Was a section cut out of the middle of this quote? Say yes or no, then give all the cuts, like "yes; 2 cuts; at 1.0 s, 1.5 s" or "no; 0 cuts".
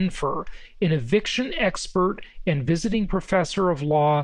no; 0 cuts